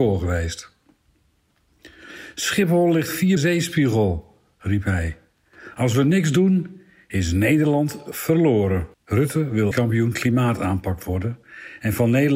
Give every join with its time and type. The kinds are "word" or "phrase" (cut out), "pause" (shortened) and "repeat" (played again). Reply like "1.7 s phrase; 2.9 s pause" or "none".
3.4 s phrase; 8.9 s pause; 9.7 s word

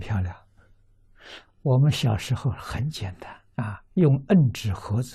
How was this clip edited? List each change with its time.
3.5 s pause

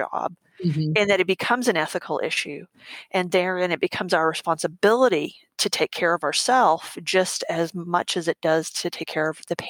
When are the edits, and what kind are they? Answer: none

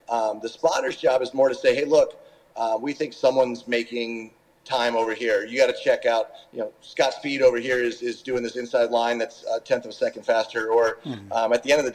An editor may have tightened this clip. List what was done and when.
none

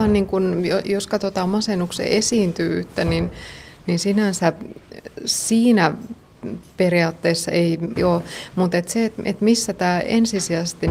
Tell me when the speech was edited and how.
8.0 s phrase

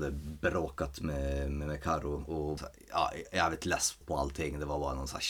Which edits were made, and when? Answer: 2.6 s word; 4.0 s word

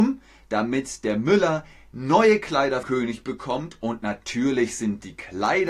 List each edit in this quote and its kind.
2.8 s word

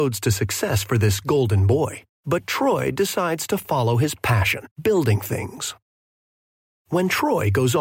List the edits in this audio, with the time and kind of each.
2.1 s pause; 4.7 s pause

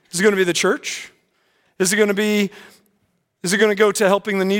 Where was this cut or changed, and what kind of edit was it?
none

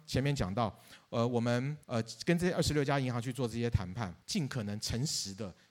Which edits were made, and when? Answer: 1.8 s pause; 4.2 s pause

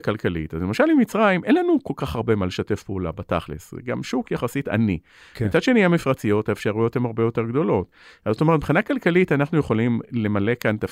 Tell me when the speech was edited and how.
none

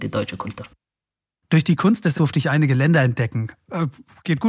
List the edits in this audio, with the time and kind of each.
2.1 s word

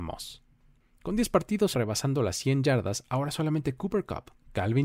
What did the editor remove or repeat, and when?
1.7 s phrase

